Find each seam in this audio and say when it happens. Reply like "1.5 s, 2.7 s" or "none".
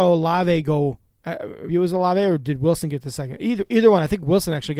1.7 s